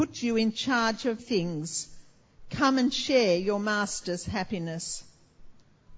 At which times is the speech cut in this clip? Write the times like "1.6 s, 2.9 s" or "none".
1.2 s